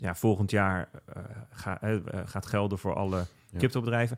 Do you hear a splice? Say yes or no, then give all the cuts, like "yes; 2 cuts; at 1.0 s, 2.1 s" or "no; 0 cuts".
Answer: no; 0 cuts